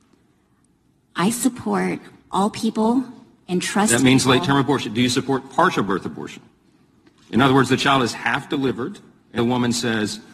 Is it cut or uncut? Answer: cut